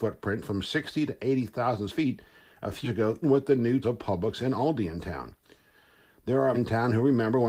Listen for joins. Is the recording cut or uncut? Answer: cut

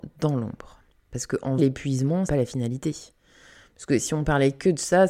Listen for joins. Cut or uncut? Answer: cut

